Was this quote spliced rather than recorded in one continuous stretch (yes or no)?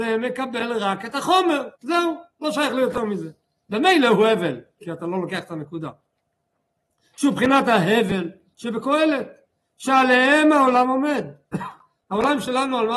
yes